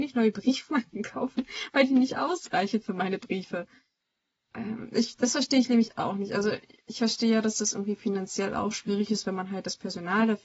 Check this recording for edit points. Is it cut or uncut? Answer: uncut